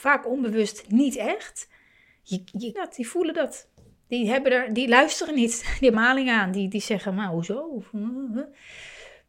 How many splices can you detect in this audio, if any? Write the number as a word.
two